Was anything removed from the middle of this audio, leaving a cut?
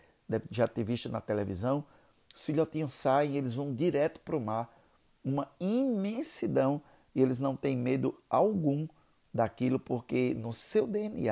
no; 0 cuts

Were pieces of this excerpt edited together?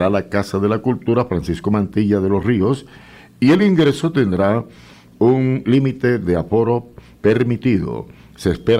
no; 0 cuts

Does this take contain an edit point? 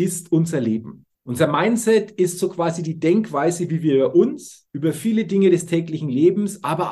yes; 2 cuts; at 1.1 s, 4.7 s

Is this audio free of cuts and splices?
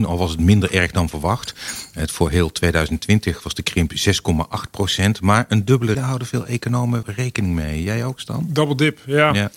no; 2 cuts; at 5.9 s, 7.0 s

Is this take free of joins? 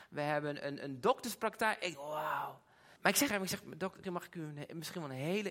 no; 4 cuts; at 1.9 s, 3.0 s, 3.3 s, 4.0 s

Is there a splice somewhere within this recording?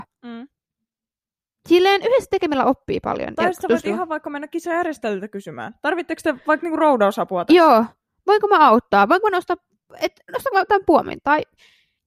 no; 0 cuts

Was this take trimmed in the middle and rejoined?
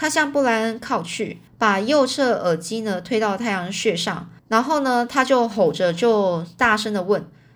yes; 2 cuts; at 1.5 s, 4.4 s

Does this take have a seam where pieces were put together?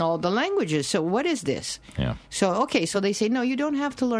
no; 0 cuts

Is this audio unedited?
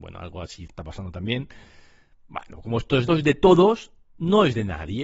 no; 1 cut; at 3.1 s

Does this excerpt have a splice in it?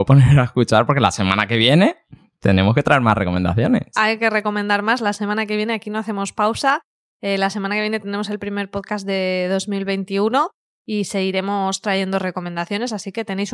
no; 0 cuts

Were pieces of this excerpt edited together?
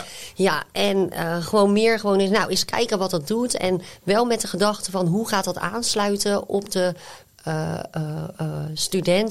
no; 0 cuts

